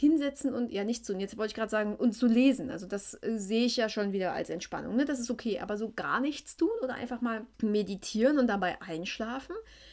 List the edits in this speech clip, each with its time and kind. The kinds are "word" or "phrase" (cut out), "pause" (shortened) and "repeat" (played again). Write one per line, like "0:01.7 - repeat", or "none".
0:07.5 - pause